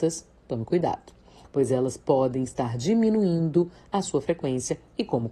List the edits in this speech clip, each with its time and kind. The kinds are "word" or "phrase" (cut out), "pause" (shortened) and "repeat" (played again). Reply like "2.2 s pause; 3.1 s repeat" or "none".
none